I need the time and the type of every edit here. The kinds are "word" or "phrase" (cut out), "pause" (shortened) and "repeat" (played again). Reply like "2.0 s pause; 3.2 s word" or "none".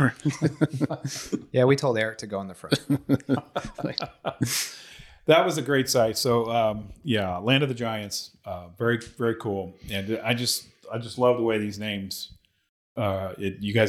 none